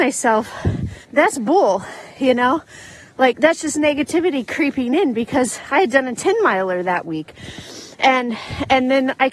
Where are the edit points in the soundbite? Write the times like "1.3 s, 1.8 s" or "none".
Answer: 1.0 s, 3.3 s